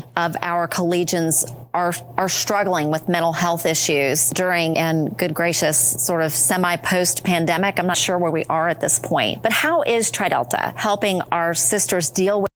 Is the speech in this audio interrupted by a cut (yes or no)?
yes